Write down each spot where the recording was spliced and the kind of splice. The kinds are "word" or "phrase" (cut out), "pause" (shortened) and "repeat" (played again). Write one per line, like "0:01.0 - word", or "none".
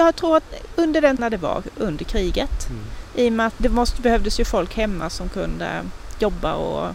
0:01.2 - word
0:03.6 - word